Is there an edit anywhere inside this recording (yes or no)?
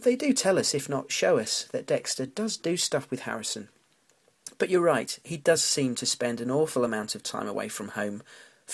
no